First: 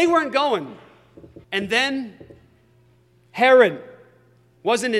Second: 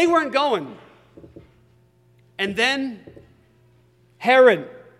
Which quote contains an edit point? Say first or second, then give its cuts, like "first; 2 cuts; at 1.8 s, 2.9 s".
first; 1 cut; at 1.4 s